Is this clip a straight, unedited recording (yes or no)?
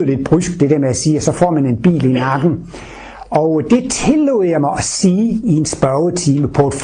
yes